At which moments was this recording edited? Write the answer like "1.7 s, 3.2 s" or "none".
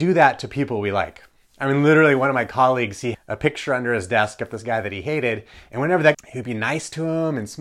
3.1 s, 6.1 s